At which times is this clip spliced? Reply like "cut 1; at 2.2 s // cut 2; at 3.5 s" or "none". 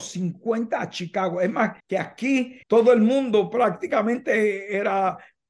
cut 1; at 1.8 s // cut 2; at 2.6 s